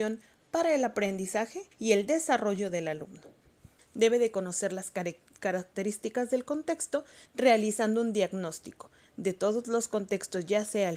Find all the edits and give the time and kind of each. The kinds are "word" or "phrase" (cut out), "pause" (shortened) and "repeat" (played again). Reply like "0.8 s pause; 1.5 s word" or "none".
1.7 s pause; 3.8 s pause